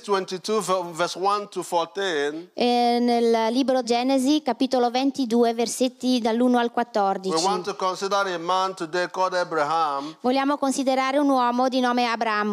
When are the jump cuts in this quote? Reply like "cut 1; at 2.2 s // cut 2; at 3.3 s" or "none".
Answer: cut 1; at 3.8 s